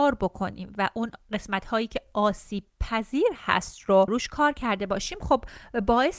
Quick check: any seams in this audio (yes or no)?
no